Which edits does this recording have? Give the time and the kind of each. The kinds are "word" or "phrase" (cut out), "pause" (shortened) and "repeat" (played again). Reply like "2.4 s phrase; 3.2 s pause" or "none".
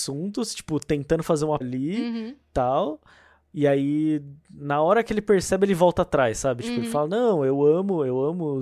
1.6 s word